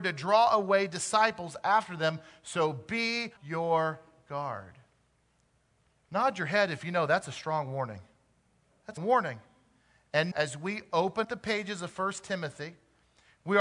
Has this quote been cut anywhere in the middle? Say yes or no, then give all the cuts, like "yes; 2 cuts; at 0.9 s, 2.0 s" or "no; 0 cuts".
yes; 4 cuts; at 3.4 s, 9.0 s, 10.3 s, 11.2 s